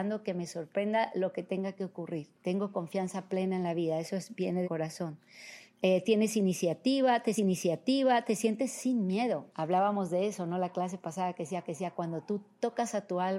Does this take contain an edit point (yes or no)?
yes